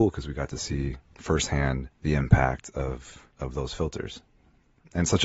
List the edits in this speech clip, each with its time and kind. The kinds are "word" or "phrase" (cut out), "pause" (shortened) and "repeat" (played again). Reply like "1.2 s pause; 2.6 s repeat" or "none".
1.9 s pause; 3.3 s pause